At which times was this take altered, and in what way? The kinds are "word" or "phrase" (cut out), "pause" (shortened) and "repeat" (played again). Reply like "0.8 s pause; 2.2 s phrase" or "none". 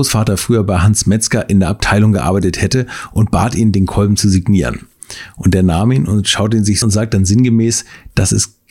6.8 s phrase